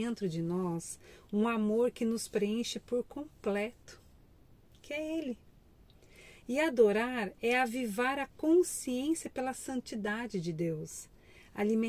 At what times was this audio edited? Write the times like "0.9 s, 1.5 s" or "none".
none